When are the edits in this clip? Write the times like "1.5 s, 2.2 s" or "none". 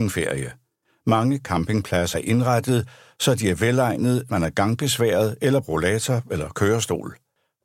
2.1 s, 4.3 s, 5.6 s